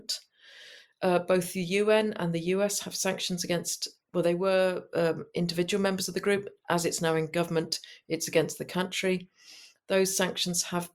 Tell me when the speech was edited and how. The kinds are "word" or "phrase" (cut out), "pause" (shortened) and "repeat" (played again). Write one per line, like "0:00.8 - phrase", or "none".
none